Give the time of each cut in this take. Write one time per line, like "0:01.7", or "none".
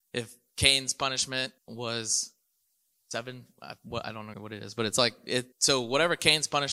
0:01.6
0:04.3
0:05.5